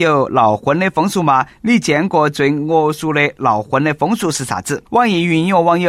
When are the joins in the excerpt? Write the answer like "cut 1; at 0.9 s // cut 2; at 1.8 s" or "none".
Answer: cut 1; at 4.9 s